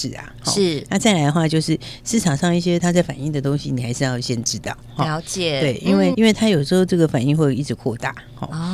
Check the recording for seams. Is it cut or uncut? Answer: cut